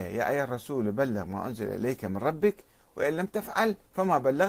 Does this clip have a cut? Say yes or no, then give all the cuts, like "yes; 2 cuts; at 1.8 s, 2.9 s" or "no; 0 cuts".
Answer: no; 0 cuts